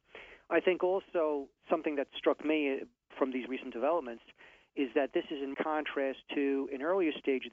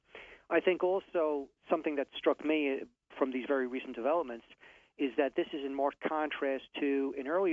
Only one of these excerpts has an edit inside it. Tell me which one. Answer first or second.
first